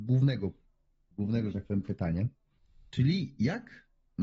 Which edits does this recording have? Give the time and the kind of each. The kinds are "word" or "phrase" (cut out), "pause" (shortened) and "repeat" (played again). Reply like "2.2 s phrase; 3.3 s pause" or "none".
2.6 s pause